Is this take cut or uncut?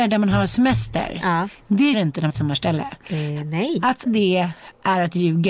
cut